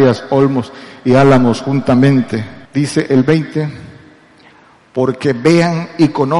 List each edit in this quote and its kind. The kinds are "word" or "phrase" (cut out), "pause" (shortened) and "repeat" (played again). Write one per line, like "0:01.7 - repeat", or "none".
0:02.7 - pause